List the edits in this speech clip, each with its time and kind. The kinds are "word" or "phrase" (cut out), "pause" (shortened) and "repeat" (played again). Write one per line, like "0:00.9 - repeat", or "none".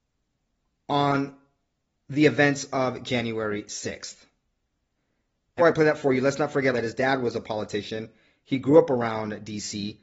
0:05.6 - word
0:06.7 - word